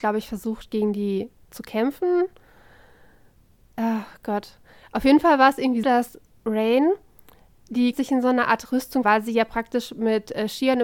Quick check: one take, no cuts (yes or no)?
no